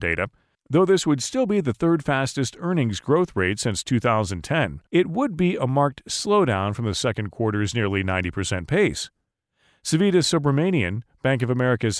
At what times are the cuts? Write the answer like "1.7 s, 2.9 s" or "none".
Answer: 4.9 s

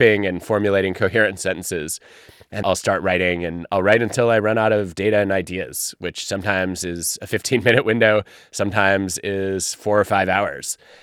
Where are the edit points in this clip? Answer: 2.6 s

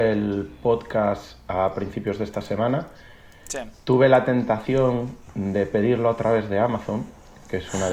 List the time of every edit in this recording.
none

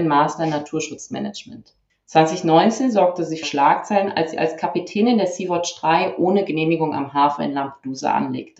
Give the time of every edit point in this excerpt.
1.9 s, 3.4 s

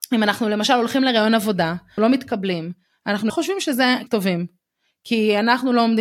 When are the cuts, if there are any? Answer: 2.0 s, 3.3 s, 4.1 s

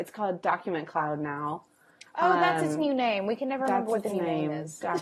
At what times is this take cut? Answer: none

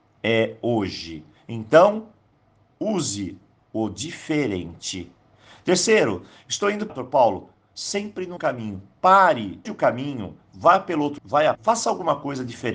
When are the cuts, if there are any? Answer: 6.9 s, 8.4 s, 9.6 s, 11.2 s, 11.5 s

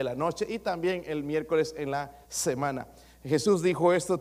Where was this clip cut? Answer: 2.2 s

